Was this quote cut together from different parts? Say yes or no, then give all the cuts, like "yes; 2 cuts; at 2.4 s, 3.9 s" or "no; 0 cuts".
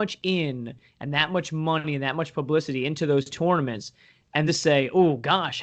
yes; 2 cuts; at 3.3 s, 4.5 s